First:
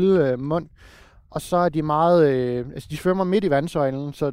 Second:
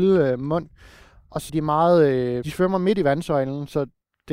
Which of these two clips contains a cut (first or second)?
second